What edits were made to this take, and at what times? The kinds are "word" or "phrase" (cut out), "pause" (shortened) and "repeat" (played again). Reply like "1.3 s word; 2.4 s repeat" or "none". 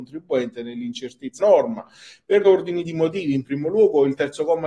1.4 s word; 2.4 s word